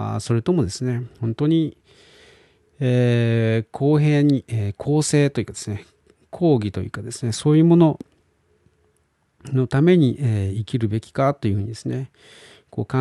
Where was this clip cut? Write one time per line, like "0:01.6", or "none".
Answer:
0:01.1